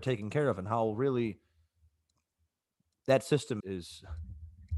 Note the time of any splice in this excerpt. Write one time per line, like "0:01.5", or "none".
0:03.6